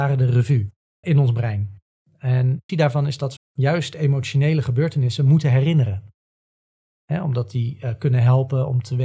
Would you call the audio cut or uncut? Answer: cut